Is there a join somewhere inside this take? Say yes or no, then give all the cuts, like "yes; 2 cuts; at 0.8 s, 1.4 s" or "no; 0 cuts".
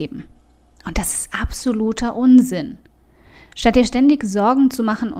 no; 0 cuts